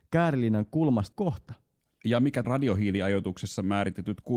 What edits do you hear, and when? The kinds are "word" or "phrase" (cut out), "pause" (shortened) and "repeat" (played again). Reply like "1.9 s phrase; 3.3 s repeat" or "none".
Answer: 1.1 s phrase; 1.8 s pause; 2.4 s word